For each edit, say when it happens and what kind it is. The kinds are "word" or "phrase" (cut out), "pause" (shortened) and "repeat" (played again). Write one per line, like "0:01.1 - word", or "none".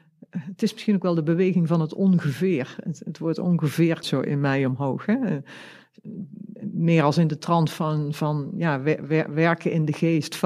0:04.0 - word

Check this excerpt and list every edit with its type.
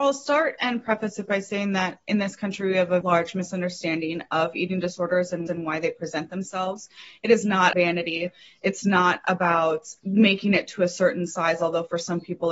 0:03.0 - word
0:05.5 - repeat
0:07.7 - word

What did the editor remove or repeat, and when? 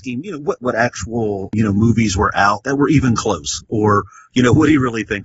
none

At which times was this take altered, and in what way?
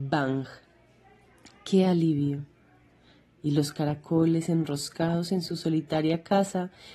none

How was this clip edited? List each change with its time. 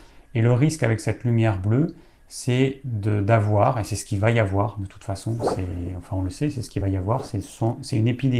none

